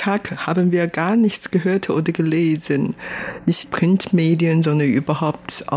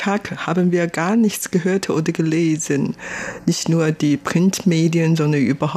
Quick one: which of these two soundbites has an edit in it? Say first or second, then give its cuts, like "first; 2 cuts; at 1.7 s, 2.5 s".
first; 1 cut; at 3.6 s